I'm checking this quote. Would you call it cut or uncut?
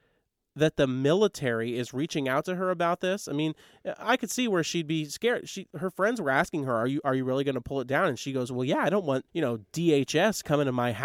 cut